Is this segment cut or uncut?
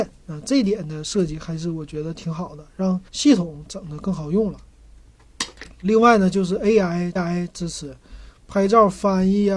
cut